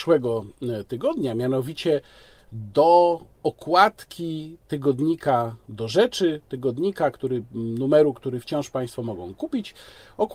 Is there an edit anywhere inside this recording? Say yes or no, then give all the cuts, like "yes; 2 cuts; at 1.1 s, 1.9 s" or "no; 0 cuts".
no; 0 cuts